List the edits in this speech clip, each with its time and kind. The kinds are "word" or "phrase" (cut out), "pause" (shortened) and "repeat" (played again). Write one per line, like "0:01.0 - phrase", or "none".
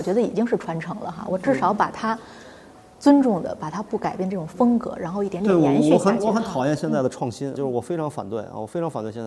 0:07.5 - word